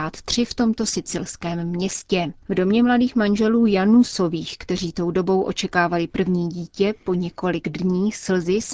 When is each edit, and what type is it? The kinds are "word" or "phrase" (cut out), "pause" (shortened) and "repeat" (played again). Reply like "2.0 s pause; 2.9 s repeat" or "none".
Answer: 2.4 s pause